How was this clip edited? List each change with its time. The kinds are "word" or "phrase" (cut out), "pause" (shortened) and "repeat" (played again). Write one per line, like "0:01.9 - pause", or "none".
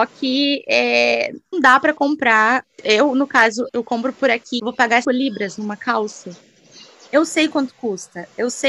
0:01.5 - word
0:02.8 - word
0:03.7 - word
0:04.6 - word
0:05.0 - word